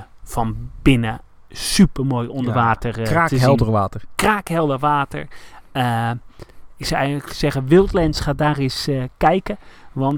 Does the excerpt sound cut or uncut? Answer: uncut